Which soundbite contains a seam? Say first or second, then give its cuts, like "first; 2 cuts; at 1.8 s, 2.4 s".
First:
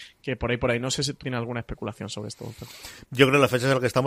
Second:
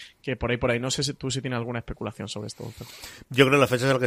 first; 1 cut; at 1.2 s